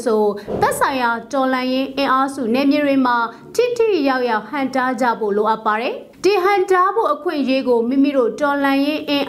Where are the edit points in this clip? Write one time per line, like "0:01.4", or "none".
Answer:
0:06.1